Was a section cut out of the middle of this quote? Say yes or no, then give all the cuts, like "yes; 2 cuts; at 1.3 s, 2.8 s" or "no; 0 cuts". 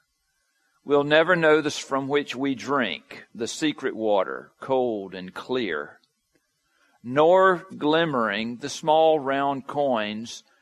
yes; 2 cuts; at 1.7 s, 7.7 s